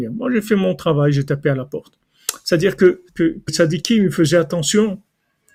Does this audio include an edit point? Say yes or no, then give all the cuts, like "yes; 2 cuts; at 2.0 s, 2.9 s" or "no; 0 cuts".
yes; 2 cuts; at 3.1 s, 3.5 s